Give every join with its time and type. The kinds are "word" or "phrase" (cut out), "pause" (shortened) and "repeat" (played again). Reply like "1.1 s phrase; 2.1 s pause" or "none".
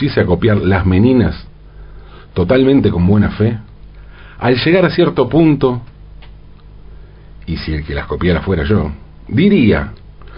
none